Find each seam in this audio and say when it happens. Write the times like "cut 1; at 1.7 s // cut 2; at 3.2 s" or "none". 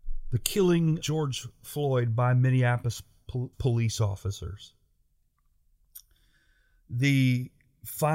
cut 1; at 1.0 s // cut 2; at 3.5 s

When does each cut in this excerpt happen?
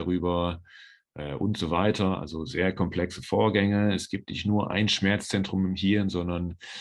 none

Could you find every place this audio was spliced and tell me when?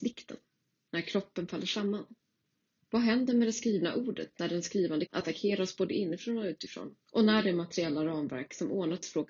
cut 1; at 5.1 s // cut 2; at 7.0 s

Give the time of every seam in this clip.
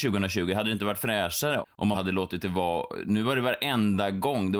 cut 1; at 1.6 s // cut 2; at 1.9 s

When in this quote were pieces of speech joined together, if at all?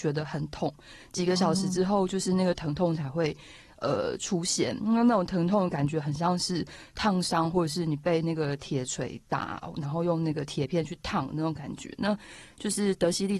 none

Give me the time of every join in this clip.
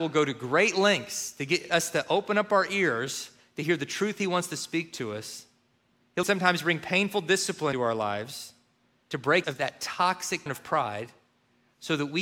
cut 1; at 6.2 s // cut 2; at 7.7 s // cut 3; at 9.4 s // cut 4; at 10.5 s

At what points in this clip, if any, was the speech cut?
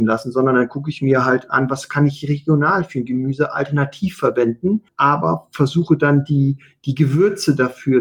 none

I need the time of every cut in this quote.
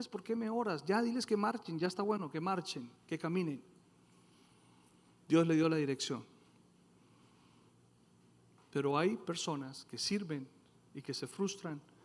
cut 1; at 3.0 s

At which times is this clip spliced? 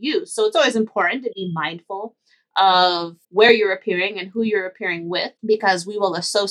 cut 1; at 3.2 s // cut 2; at 5.4 s

